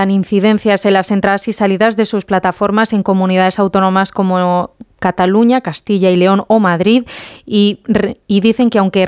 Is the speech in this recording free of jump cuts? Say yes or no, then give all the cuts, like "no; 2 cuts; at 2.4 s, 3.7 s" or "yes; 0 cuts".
yes; 0 cuts